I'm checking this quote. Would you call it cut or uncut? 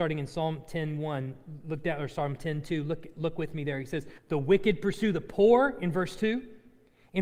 cut